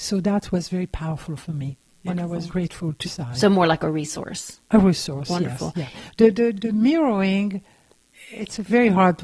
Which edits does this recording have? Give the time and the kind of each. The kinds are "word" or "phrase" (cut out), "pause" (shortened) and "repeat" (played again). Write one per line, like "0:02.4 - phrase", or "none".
0:01.9 - pause
0:02.5 - word
0:03.0 - phrase
0:06.5 - word